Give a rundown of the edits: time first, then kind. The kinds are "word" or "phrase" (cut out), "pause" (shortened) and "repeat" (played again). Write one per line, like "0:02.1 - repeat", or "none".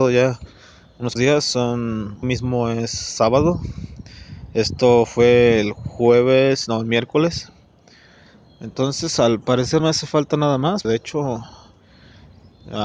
0:01.2 - word
0:02.2 - word
0:09.8 - word
0:10.8 - word